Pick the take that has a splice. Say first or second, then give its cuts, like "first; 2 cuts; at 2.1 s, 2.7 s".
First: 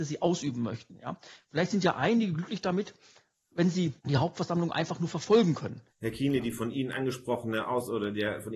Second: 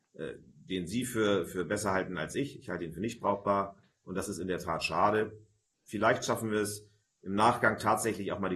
first; 2 cuts; at 4.0 s, 5.9 s